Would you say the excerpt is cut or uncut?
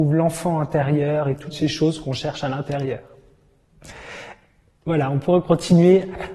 uncut